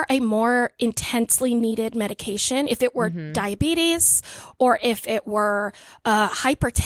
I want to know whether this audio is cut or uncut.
uncut